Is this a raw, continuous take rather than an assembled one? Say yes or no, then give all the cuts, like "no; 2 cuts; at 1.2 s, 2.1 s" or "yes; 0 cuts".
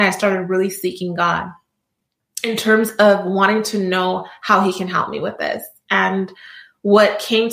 yes; 0 cuts